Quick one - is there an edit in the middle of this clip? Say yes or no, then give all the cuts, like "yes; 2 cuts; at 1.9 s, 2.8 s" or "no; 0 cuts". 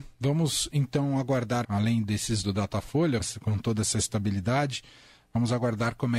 yes; 3 cuts; at 1.6 s, 2.4 s, 3.2 s